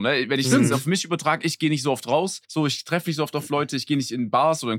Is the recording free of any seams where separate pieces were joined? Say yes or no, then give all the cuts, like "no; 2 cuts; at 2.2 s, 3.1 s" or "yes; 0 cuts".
no; 1 cut; at 2.4 s